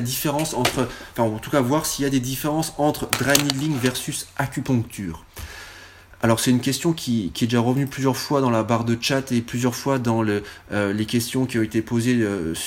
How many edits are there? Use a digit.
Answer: 0